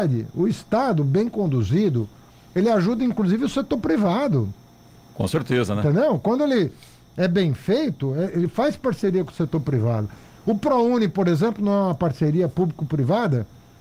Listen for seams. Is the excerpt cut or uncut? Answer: uncut